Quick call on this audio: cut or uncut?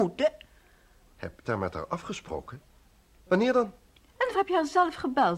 cut